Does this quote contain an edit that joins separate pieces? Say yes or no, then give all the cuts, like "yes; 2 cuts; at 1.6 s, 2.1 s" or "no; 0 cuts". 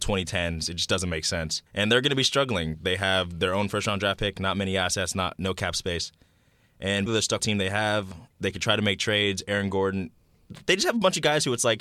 yes; 4 cuts; at 1.7 s, 7.1 s, 7.4 s, 8.3 s